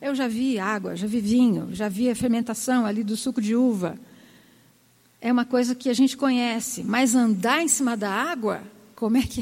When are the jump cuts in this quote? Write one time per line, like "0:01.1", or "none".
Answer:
none